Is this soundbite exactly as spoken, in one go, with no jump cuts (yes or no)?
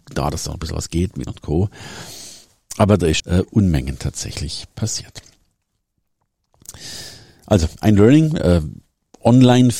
no